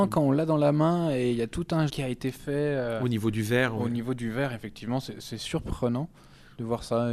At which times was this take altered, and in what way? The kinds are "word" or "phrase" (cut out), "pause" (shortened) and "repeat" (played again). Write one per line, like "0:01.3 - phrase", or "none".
0:01.9 - word